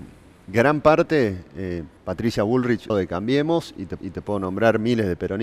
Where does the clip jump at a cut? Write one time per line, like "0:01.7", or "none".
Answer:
0:02.0
0:02.9
0:04.0